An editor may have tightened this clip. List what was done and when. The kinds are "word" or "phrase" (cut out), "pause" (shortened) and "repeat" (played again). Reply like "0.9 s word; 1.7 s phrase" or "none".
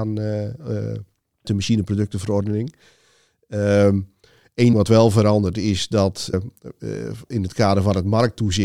1.4 s word; 4.7 s word; 6.3 s word

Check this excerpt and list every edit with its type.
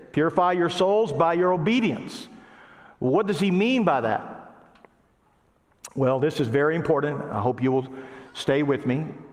none

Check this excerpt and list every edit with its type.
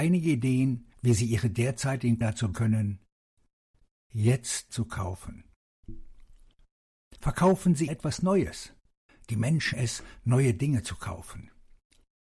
0.9 s pause; 2.2 s word; 2.5 s word; 4.7 s word; 7.2 s pause; 7.9 s word; 9.1 s pause; 9.7 s word

